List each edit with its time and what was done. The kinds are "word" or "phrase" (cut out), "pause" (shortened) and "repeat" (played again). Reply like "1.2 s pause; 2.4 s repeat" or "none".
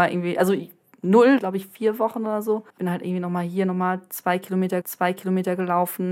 1.4 s phrase; 2.7 s pause; 4.8 s repeat